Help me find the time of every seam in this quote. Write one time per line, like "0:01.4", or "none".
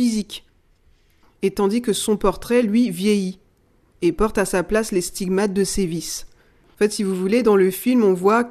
none